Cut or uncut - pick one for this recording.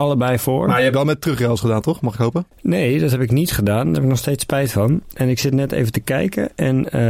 cut